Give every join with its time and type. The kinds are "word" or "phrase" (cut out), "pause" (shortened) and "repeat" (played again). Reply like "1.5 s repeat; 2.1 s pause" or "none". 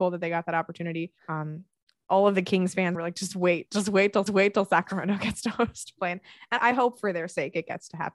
1.2 s pause; 2.9 s phrase; 4.3 s repeat; 6.6 s word